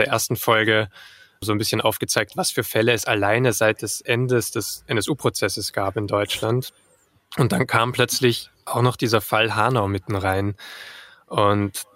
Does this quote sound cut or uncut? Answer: uncut